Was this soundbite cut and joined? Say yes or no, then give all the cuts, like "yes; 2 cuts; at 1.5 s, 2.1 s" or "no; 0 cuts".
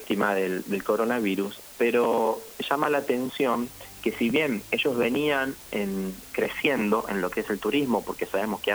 no; 0 cuts